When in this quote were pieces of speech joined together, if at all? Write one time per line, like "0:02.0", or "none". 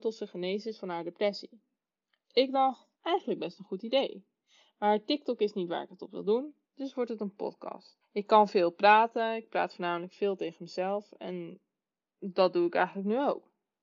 0:01.7
0:02.9
0:06.6
0:08.0